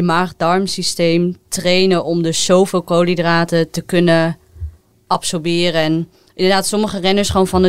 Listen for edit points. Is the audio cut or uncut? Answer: uncut